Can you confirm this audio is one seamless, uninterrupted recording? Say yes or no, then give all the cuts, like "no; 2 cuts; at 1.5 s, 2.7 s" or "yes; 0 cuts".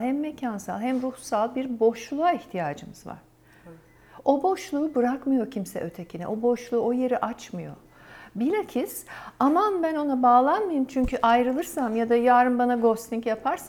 yes; 0 cuts